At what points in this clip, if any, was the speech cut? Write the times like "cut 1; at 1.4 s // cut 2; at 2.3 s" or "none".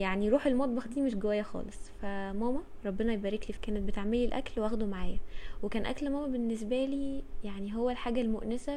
cut 1; at 3.6 s